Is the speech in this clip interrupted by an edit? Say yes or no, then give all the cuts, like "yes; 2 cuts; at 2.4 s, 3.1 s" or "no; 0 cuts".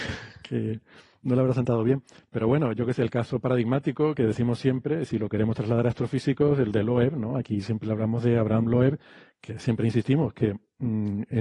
no; 0 cuts